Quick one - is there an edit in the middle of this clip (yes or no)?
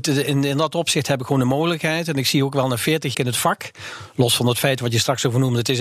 yes